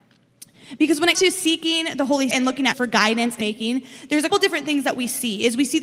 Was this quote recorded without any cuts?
no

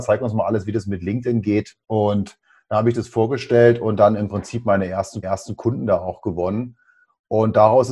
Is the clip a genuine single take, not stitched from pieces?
no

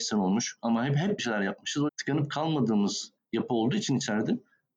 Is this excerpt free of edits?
no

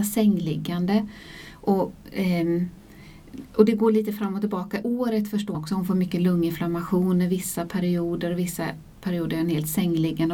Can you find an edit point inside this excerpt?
yes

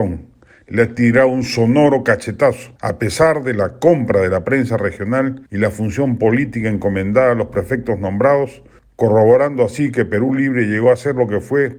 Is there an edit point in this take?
yes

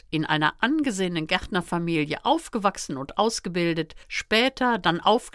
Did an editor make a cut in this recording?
yes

